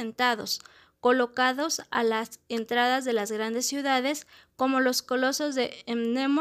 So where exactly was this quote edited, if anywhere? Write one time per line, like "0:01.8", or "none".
none